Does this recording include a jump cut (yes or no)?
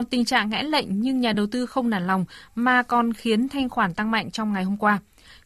no